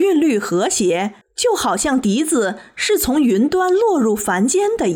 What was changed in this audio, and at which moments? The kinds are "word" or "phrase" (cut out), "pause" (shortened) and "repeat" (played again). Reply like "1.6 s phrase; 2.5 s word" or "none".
1.2 s pause